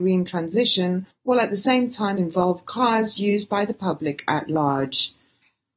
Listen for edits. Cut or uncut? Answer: cut